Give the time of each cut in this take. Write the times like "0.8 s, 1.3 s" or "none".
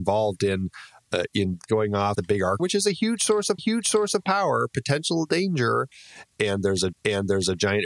1.7 s, 2.1 s, 2.6 s, 3.6 s, 6.9 s

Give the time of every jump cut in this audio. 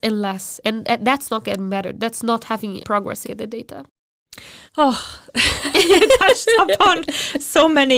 2.8 s, 3.2 s, 4.7 s

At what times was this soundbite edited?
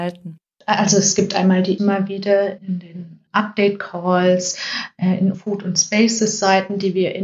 1.8 s, 2.6 s, 3.3 s, 5.3 s

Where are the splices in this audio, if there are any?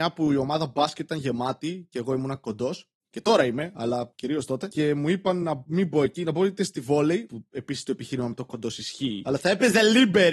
none

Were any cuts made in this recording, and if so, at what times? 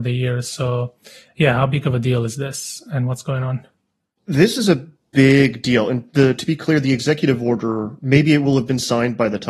none

